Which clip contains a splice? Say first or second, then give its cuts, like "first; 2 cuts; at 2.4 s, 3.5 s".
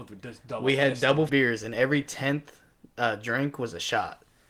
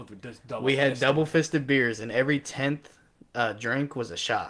first; 1 cut; at 1.3 s